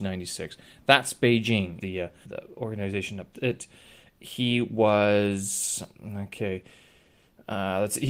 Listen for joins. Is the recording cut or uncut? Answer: cut